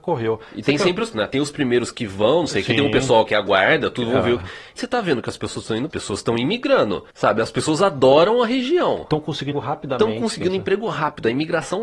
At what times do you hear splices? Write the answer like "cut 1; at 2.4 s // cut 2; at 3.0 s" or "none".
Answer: cut 1; at 1.1 s // cut 2; at 3.3 s // cut 3; at 4.8 s // cut 4; at 5.9 s // cut 5; at 7.1 s // cut 6; at 9.5 s